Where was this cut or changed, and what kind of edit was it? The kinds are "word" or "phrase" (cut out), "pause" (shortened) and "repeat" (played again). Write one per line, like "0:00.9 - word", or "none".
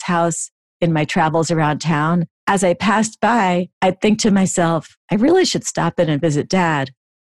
0:02.4 - pause
0:03.7 - pause
0:05.0 - pause